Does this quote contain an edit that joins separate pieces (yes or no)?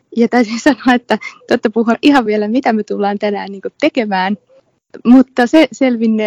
yes